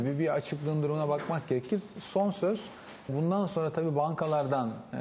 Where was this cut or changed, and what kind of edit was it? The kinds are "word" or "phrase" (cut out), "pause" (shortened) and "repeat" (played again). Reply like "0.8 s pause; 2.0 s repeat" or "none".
3.1 s word

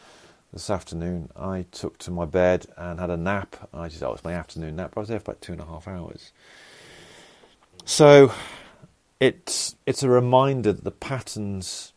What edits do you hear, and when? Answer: 9.8 s pause

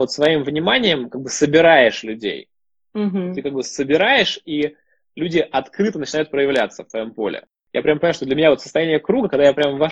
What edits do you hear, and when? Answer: none

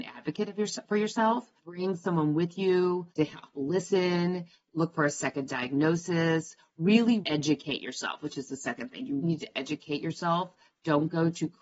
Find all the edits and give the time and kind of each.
1.6 s pause; 3.1 s pause; 7.2 s word; 9.2 s word

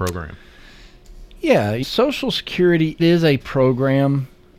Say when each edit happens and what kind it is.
1.8 s word; 3.0 s word; 3.4 s word

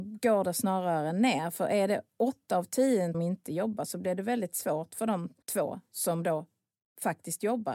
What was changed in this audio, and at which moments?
3.1 s phrase; 5.4 s pause

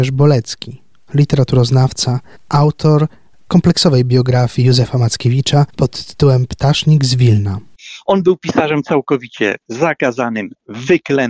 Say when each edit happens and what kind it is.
2.3 s pause; 5.7 s pause

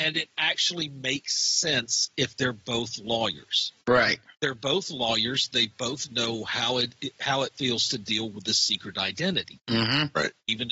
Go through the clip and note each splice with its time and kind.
none

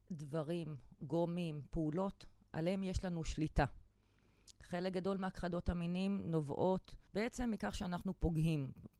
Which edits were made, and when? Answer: 7.1 s pause

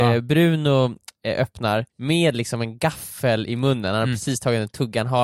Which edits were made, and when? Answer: 1.9 s pause

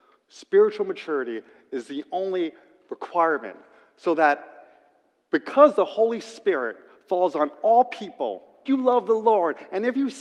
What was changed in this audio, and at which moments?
8.7 s word

